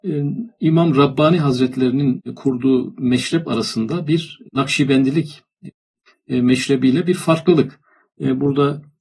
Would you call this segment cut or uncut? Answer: uncut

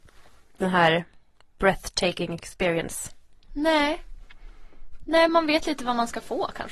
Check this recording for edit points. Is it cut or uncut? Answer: uncut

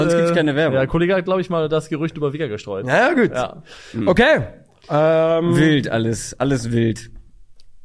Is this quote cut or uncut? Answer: uncut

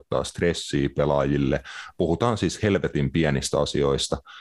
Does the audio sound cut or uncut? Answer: uncut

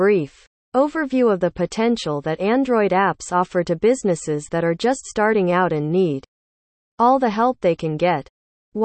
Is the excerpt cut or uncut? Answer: uncut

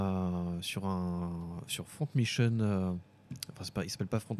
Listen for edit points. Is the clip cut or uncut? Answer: uncut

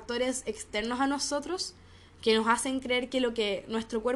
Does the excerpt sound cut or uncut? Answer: uncut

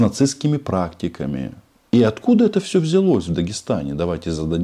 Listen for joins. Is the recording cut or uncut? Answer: uncut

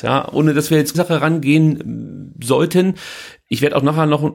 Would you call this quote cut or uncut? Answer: cut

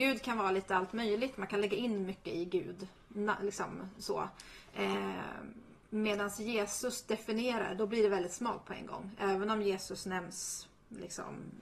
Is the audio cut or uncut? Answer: uncut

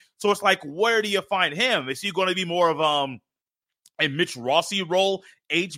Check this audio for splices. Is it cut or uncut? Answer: uncut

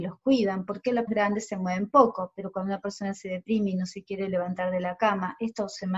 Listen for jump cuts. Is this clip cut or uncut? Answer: cut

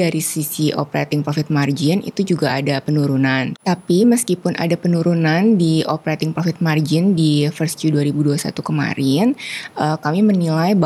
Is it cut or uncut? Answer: uncut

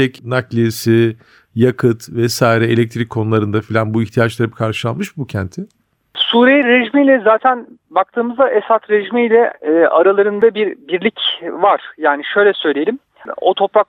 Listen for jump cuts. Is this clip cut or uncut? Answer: uncut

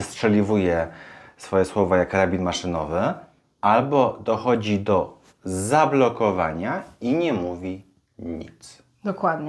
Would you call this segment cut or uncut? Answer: uncut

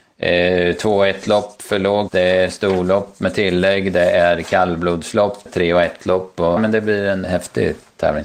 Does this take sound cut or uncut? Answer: cut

